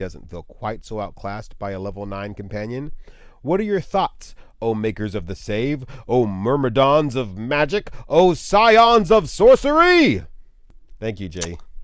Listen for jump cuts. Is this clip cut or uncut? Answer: uncut